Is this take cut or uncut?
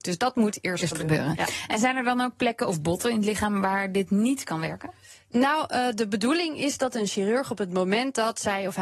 uncut